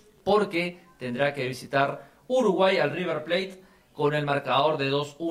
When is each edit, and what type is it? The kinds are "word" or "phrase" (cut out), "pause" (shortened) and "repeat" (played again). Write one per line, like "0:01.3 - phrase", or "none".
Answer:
none